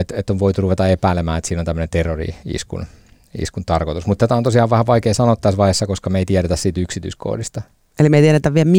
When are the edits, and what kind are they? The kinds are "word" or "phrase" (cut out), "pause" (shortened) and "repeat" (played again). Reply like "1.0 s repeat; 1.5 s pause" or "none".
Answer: none